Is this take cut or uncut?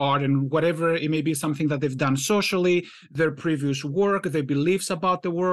uncut